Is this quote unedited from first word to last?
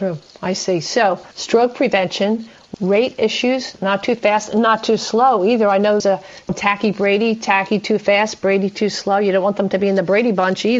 no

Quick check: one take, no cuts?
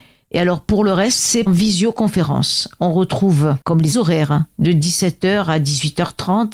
no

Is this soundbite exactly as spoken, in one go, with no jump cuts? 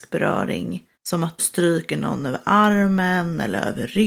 no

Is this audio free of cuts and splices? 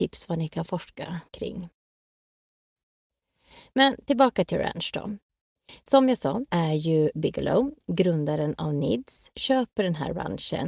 no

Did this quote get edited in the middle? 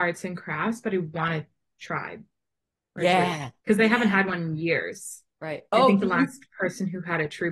yes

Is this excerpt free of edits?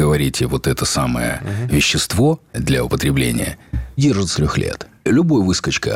no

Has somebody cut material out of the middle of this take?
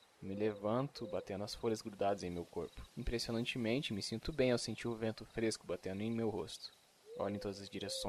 yes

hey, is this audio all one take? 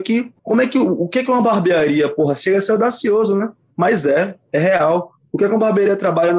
yes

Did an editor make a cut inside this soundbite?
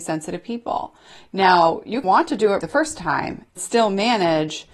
yes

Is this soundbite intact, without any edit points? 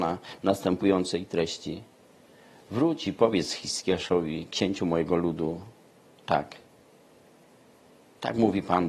yes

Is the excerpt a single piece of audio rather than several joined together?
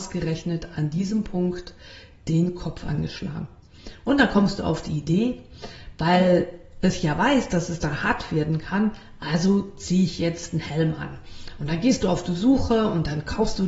yes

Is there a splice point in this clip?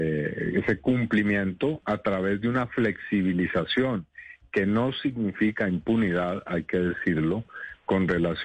no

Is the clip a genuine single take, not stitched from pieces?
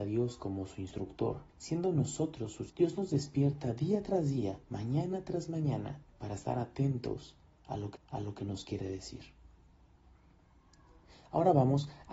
no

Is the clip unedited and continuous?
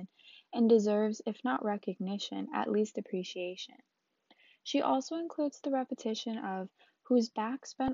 yes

